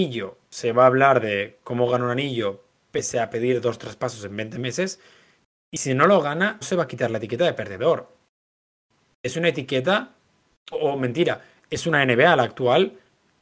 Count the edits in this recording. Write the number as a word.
one